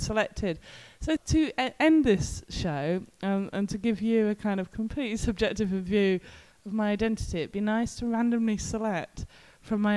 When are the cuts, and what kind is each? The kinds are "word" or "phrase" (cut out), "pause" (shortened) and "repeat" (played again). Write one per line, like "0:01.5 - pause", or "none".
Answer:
0:01.2 - word